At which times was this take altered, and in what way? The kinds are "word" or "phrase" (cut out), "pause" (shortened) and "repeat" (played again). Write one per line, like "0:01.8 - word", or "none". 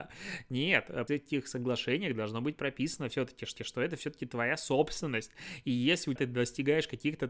0:01.1 - word
0:03.6 - repeat
0:06.2 - word